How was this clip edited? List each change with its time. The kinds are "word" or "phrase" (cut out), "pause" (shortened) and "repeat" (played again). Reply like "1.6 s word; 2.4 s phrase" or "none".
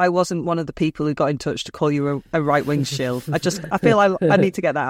none